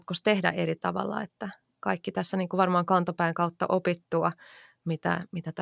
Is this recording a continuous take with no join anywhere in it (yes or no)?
yes